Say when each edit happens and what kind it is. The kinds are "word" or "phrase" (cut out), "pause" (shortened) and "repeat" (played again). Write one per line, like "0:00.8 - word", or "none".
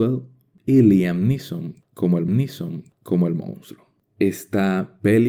0:02.3 - repeat